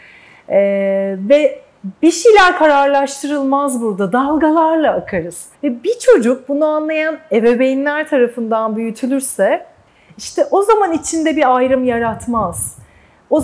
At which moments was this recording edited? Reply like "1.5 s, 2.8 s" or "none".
5.5 s